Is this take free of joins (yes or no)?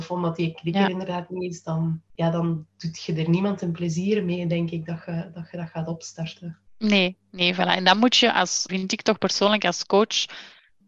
no